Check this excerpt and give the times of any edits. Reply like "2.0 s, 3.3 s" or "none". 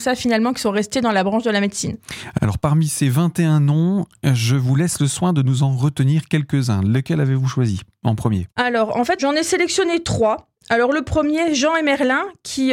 none